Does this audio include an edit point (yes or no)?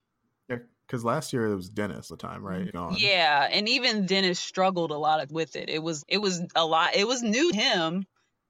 yes